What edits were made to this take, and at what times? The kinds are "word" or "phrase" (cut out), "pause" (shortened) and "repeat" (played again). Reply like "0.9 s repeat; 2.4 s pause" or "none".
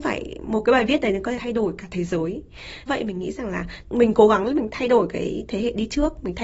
1.4 s word; 2.9 s word; 3.9 s phrase